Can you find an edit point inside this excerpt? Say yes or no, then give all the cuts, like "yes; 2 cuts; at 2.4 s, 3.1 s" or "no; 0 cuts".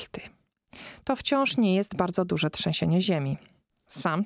no; 0 cuts